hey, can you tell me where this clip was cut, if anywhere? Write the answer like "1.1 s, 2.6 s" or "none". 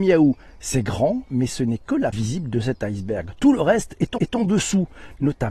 2.1 s, 4.2 s